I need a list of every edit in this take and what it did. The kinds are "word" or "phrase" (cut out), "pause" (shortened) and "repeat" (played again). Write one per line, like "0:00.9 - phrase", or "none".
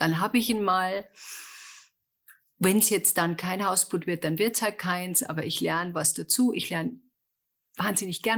none